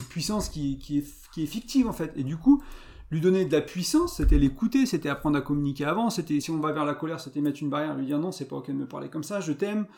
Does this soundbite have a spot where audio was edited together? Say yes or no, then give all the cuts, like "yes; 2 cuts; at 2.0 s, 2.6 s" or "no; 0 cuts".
yes; 1 cut; at 6.4 s